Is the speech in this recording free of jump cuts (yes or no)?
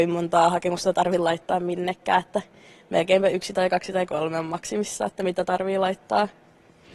yes